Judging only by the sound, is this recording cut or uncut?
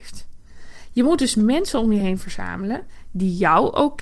uncut